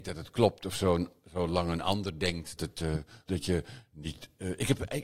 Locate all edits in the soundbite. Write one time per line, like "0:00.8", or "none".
0:02.6
0:03.3